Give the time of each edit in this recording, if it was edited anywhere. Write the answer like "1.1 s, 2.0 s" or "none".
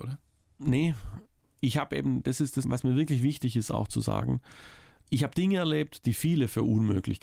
none